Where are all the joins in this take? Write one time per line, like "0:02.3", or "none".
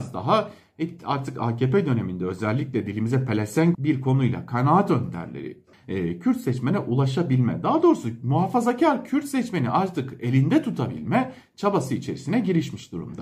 0:03.7
0:05.7